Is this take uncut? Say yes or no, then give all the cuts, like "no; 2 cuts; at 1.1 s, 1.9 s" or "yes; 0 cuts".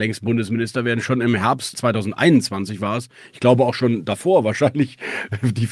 yes; 0 cuts